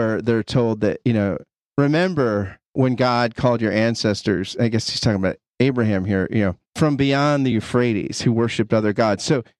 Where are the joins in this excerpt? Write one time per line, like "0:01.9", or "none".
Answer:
none